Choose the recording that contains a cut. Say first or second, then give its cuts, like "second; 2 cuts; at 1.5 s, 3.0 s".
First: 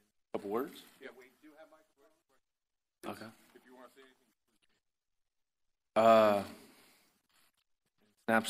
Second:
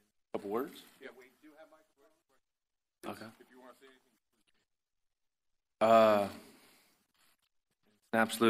second; 1 cut; at 3.3 s